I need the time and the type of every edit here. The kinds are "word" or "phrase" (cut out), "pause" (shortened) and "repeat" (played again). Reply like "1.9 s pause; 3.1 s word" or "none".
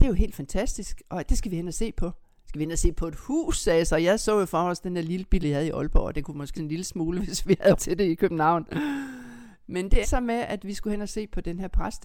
5.4 s word; 6.5 s word; 7.7 s word; 10.0 s word